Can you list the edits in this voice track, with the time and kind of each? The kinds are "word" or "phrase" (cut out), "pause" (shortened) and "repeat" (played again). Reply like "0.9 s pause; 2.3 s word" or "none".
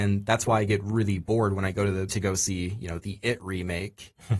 2.1 s word